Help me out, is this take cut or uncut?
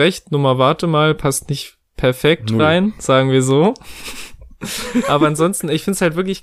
uncut